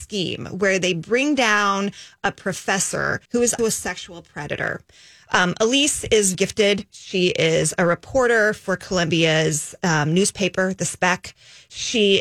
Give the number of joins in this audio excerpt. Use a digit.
3